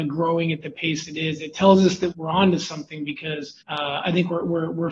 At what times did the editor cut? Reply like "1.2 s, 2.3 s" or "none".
2.1 s, 3.6 s